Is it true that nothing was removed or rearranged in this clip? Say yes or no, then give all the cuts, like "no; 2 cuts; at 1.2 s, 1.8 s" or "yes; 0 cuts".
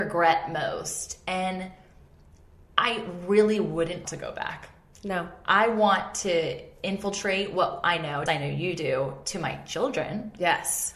no; 2 cuts; at 4.0 s, 8.3 s